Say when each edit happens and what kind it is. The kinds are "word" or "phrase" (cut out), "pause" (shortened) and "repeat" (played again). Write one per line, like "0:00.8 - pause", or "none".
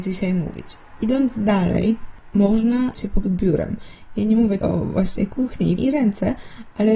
0:02.9 - word
0:03.2 - word
0:04.6 - word
0:05.8 - word